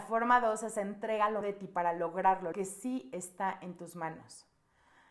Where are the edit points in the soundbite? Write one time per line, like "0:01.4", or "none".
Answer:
0:01.4
0:02.5